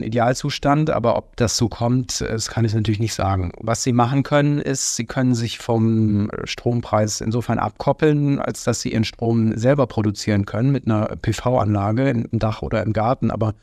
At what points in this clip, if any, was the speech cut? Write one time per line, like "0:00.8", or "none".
0:12.3